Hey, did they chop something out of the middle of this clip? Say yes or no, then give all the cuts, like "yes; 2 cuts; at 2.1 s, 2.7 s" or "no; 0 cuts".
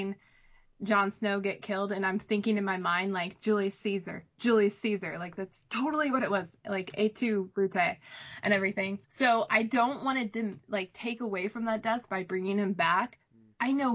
yes; 1 cut; at 9.0 s